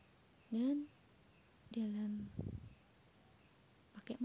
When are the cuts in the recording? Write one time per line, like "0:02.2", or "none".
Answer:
0:01.7